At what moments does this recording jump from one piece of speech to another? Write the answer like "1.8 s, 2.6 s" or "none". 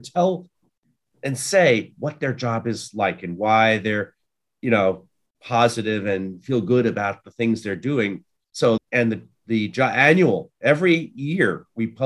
8.8 s